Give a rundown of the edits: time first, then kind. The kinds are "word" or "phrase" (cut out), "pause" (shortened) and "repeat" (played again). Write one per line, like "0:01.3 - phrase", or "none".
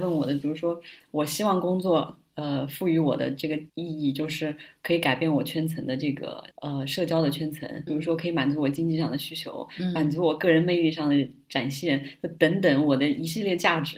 0:03.7 - pause
0:06.5 - pause
0:07.9 - word